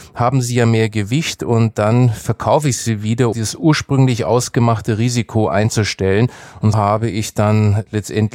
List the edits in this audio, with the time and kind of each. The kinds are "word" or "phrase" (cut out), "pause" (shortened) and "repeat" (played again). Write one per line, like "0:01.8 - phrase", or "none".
0:03.3 - word
0:06.7 - word